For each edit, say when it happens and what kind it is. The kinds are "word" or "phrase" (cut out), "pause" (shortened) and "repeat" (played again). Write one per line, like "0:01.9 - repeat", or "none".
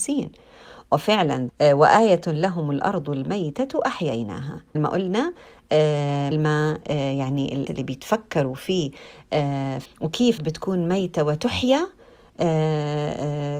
0:01.5 - word
0:04.7 - word
0:06.3 - word
0:07.7 - word
0:09.8 - word
0:10.4 - word